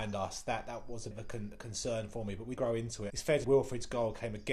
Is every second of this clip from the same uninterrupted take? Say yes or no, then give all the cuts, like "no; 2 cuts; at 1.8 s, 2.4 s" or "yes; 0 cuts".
no; 4 cuts; at 1.1 s, 2.6 s, 3.1 s, 3.4 s